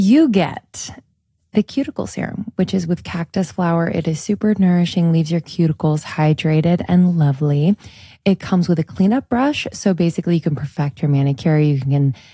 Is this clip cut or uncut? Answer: uncut